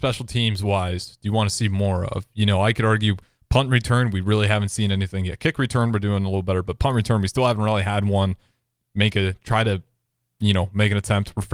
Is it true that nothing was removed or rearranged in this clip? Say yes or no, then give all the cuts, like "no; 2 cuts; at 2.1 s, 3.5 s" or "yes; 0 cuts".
yes; 0 cuts